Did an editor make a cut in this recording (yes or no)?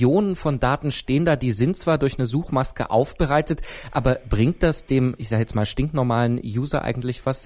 no